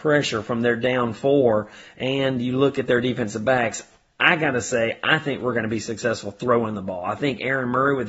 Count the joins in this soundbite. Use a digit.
0